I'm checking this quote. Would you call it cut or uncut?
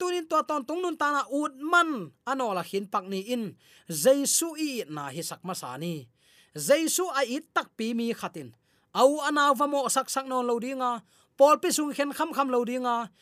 uncut